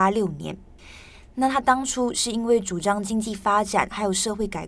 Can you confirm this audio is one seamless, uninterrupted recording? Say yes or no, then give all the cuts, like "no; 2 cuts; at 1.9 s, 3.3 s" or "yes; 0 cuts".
yes; 0 cuts